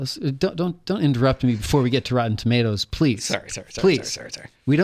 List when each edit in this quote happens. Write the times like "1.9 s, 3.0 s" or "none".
none